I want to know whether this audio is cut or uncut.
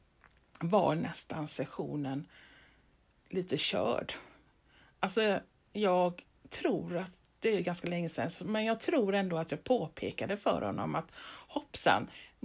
uncut